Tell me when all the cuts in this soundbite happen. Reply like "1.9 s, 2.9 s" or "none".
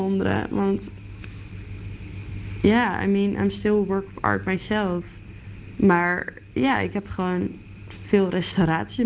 none